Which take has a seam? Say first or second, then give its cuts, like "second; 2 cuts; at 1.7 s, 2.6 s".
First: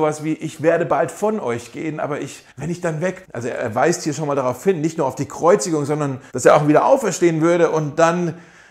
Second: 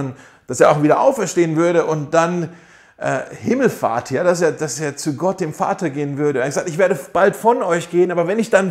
first; 3 cuts; at 2.5 s, 3.2 s, 6.3 s